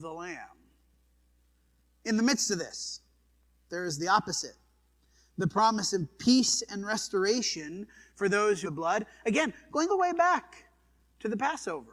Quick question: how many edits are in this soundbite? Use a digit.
2